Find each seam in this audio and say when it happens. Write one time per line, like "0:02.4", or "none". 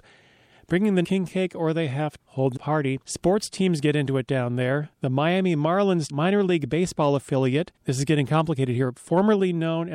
0:01.0
0:02.2
0:02.6
0:03.0
0:04.9
0:06.1
0:07.8

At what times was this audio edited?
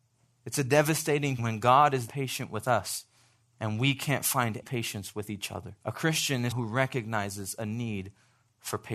0:01.4
0:02.1
0:03.4
0:04.6
0:05.8
0:06.5

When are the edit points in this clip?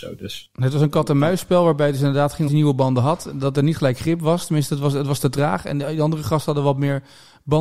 0:02.5

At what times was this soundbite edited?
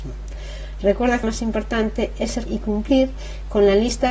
0:01.2
0:02.5

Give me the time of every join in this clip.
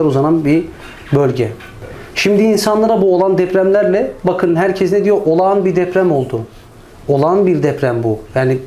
none

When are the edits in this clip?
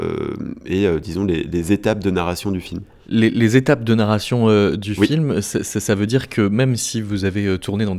none

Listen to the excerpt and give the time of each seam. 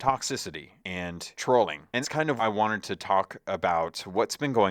0:02.0
0:02.4

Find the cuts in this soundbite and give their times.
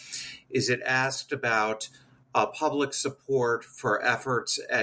none

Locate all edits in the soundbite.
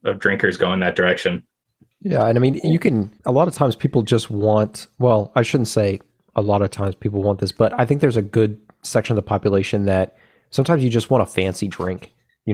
0:03.2

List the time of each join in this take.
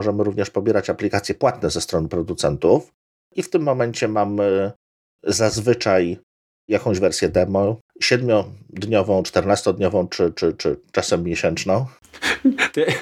none

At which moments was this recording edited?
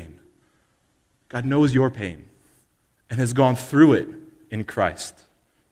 none

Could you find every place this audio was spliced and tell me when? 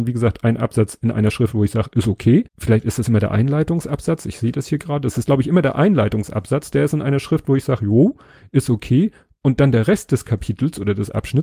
0:02.5

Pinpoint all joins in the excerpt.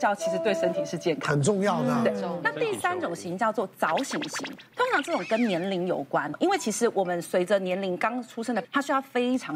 0:08.6

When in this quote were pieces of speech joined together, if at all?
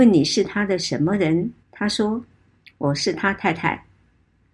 0:01.6

